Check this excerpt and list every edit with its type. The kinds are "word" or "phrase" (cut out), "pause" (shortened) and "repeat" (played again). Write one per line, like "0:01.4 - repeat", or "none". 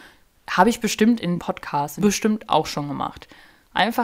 0:01.4 - word